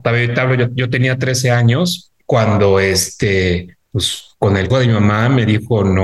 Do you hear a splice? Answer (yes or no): yes